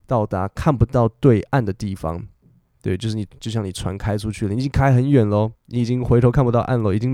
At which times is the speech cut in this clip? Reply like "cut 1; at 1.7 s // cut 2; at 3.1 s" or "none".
cut 1; at 5.5 s